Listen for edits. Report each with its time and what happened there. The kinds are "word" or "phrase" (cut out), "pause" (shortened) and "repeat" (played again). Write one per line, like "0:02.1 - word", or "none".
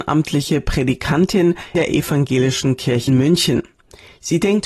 0:01.7 - word
0:03.1 - word